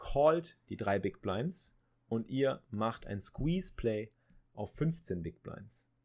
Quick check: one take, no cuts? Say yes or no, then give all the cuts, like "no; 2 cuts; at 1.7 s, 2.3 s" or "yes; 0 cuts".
yes; 0 cuts